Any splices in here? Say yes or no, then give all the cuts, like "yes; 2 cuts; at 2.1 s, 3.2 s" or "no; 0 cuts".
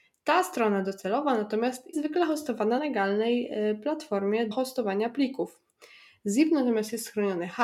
yes; 3 cuts; at 1.9 s, 2.8 s, 4.5 s